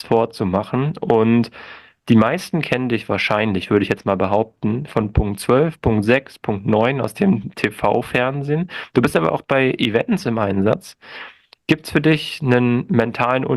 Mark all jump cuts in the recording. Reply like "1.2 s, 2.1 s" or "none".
none

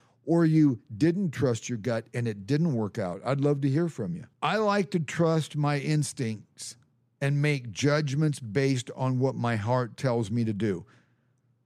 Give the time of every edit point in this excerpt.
4.3 s

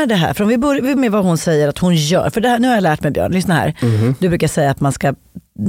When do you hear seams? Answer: 1.0 s

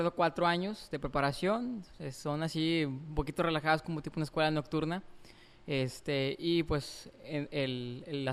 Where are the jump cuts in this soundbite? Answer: none

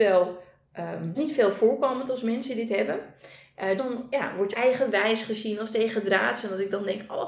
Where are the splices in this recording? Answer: 1.1 s, 3.8 s, 4.5 s

